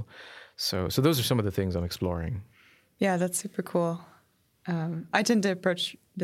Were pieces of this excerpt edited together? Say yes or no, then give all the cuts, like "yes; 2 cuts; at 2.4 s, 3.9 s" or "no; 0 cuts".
no; 0 cuts